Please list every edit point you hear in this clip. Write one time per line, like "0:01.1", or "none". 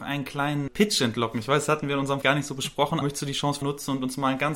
0:02.2
0:03.0
0:03.6